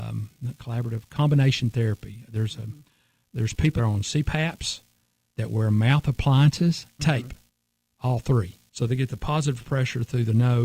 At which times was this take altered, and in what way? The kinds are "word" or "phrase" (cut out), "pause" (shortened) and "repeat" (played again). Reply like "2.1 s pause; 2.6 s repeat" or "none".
3.8 s word; 7.0 s word